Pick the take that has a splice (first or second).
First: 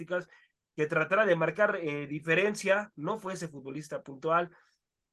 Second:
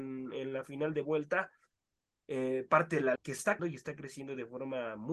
second